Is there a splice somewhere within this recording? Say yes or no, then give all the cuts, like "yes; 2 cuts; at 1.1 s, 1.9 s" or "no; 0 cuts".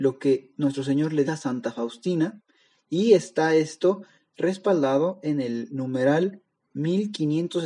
yes; 1 cut; at 1.2 s